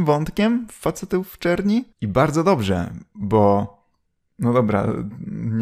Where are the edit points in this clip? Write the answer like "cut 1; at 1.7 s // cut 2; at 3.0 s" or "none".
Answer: cut 1; at 1.9 s